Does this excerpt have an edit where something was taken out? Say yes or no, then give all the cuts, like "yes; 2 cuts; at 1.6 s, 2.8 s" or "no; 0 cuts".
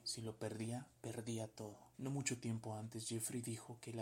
yes; 1 cut; at 1.9 s